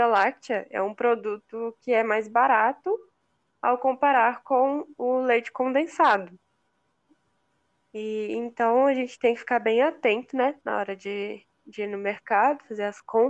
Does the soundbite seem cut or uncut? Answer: uncut